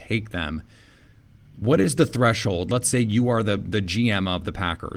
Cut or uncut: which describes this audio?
uncut